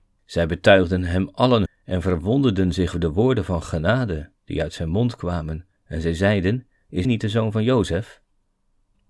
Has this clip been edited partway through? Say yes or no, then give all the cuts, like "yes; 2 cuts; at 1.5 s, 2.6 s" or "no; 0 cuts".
yes; 5 cuts; at 1.7 s, 2.9 s, 4.4 s, 5.8 s, 7.0 s